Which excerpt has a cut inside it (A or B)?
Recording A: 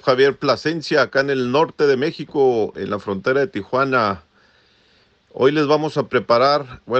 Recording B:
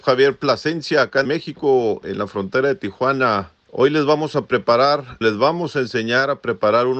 B